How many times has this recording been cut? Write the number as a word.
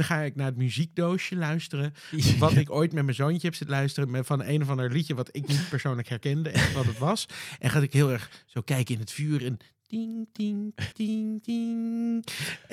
one